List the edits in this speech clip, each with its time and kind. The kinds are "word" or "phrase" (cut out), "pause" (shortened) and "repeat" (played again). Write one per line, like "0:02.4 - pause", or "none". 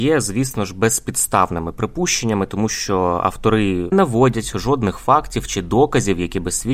0:03.9 - phrase